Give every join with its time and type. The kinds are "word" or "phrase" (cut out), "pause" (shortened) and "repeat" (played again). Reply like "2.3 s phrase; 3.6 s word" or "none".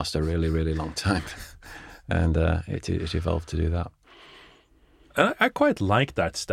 none